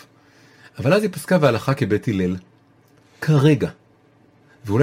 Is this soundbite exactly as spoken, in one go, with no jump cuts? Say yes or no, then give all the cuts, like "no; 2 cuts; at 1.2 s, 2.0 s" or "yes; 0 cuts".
yes; 0 cuts